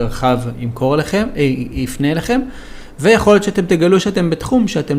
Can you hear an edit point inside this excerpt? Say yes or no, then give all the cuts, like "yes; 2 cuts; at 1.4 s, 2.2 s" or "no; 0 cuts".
no; 0 cuts